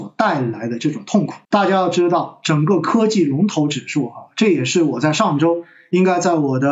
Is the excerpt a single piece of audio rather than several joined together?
no; 1 cut; at 1.4 s

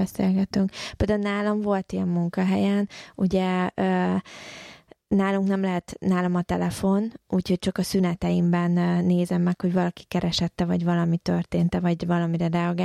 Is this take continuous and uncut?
yes; 0 cuts

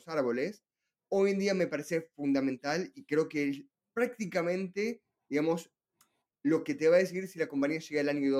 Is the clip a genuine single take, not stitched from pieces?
yes; 0 cuts

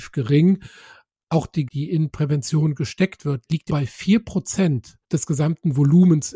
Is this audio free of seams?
no; 3 cuts; at 1.7 s, 3.7 s, 5.0 s

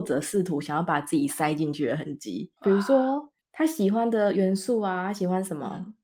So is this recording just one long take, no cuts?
no; 2 cuts; at 2.6 s, 3.4 s

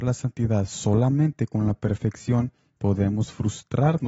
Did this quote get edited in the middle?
no; 0 cuts

